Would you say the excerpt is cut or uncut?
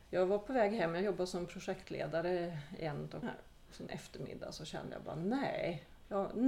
cut